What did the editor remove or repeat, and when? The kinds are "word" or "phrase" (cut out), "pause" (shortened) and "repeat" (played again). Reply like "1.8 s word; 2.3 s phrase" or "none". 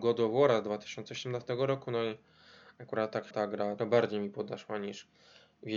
3.3 s phrase; 3.8 s word